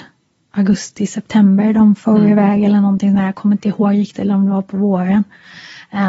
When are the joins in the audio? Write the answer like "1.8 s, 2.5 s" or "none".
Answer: none